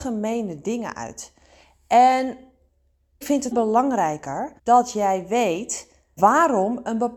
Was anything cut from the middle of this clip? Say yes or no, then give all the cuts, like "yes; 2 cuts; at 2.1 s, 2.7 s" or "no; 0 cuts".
yes; 4 cuts; at 3.2 s, 3.5 s, 4.6 s, 6.2 s